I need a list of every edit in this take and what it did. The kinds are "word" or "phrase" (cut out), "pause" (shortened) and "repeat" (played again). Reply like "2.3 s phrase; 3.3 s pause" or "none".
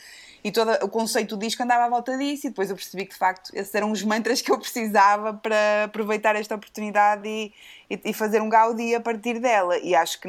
none